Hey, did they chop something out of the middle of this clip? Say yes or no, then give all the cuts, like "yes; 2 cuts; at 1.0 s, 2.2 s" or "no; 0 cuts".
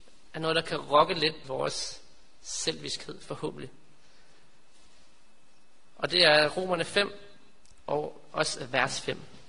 yes; 1 cut; at 1.4 s